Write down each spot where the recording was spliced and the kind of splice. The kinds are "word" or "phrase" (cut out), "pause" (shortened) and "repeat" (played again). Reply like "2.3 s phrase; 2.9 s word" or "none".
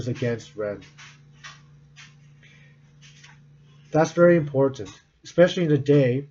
none